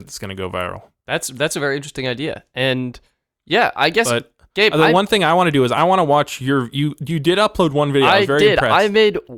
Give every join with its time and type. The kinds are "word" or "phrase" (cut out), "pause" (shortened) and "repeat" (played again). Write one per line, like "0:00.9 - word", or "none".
none

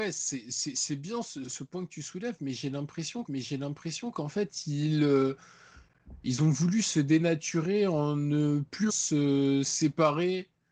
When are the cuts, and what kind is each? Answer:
0:01.4 - word
0:03.2 - repeat
0:08.9 - word

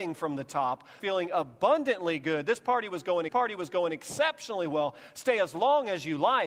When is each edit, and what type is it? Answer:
0:01.0 - phrase
0:03.3 - repeat

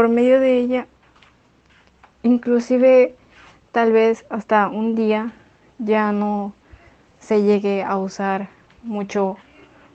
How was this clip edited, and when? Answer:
none

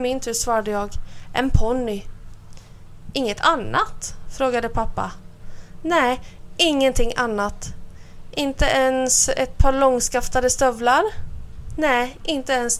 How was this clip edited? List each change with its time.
none

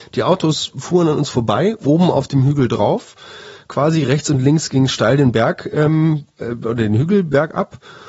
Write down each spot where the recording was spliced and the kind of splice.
none

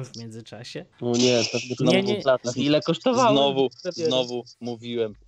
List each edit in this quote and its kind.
0:00.9 - pause
0:01.8 - phrase

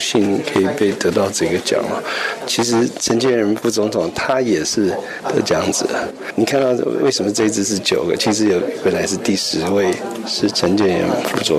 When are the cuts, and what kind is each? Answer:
none

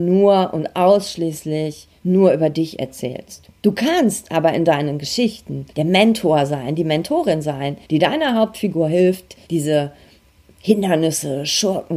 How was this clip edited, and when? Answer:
0:02.0 - pause
0:03.6 - pause
0:05.7 - pause
0:07.8 - pause
0:09.4 - pause

